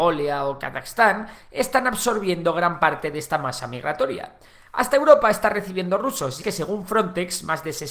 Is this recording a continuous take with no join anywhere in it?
no; 1 cut; at 6.4 s

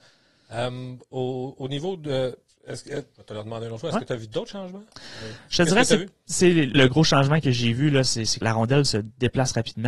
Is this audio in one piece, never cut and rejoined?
no; 3 cuts; at 3.1 s, 6.7 s, 8.4 s

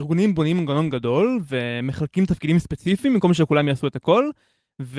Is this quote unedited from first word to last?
yes; 0 cuts

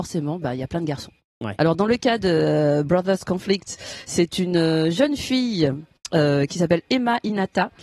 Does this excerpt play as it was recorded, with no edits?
yes; 0 cuts

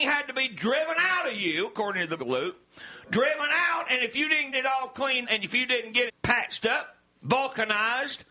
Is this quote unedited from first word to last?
no; 5 cuts; at 2.2 s, 4.5 s, 5.2 s, 6.1 s, 7.1 s

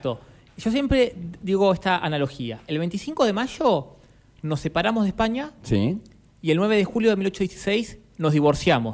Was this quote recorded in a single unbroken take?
yes; 0 cuts

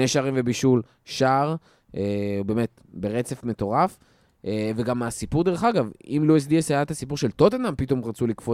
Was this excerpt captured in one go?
yes; 0 cuts

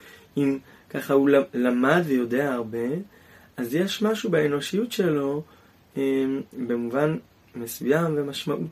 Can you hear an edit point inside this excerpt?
no; 0 cuts

